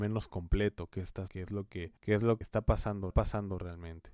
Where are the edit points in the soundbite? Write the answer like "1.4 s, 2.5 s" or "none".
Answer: 1.3 s, 2.0 s, 2.4 s, 3.1 s

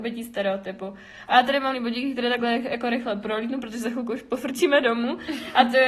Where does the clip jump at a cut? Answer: 1.7 s

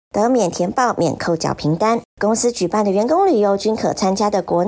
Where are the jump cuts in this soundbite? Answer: 2.1 s

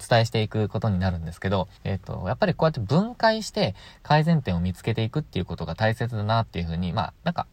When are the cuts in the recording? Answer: 1.8 s

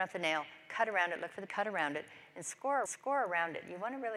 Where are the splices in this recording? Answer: 1.5 s, 2.9 s

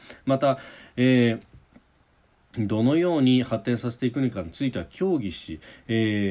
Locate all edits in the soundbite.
none

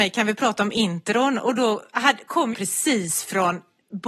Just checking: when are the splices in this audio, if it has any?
2.5 s

